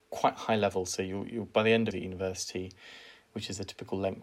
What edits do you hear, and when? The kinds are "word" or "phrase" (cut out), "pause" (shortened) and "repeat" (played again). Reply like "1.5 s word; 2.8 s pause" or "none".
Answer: 1.9 s phrase